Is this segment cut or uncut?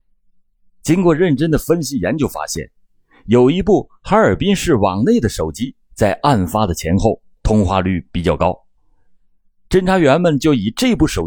uncut